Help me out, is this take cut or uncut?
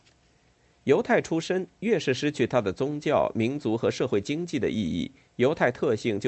uncut